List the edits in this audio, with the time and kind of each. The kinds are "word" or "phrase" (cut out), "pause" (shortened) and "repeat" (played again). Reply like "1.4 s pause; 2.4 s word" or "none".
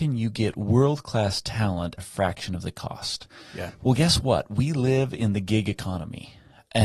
2.0 s word